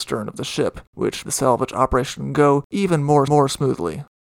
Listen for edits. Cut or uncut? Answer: cut